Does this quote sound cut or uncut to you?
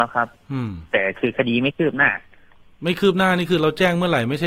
uncut